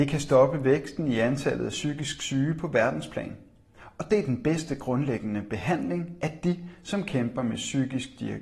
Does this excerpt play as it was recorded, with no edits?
yes; 0 cuts

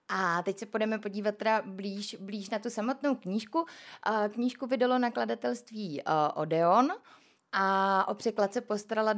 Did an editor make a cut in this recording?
no; 0 cuts

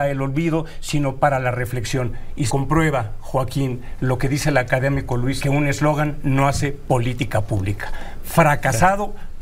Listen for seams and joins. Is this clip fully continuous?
no; 2 cuts; at 2.5 s, 5.4 s

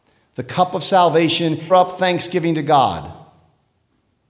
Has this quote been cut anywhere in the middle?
yes; 1 cut; at 1.7 s

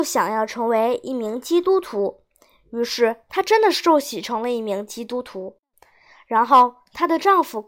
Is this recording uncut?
yes; 0 cuts

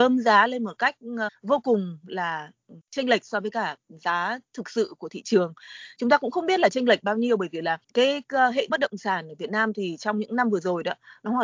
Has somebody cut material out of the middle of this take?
yes; 4 cuts; at 1.3 s, 2.8 s, 7.8 s, 8.7 s

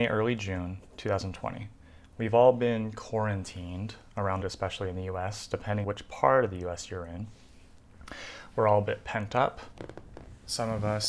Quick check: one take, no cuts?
no; 2 cuts; at 4.4 s, 5.8 s

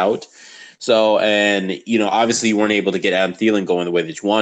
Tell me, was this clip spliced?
no; 0 cuts

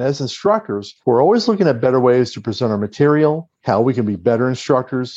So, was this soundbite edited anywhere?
yes; 2 cuts; at 1.0 s, 3.5 s

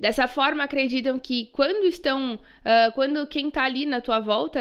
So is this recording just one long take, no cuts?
yes; 0 cuts

